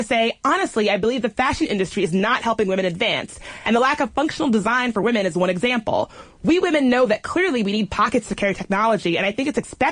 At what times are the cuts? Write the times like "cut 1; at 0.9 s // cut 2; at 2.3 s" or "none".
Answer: none